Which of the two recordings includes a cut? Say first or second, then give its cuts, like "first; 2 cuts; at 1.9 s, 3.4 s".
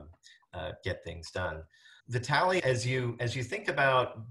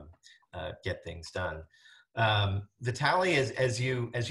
first; 2 cuts; at 2.0 s, 2.6 s